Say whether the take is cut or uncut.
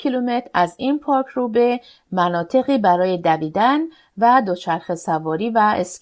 uncut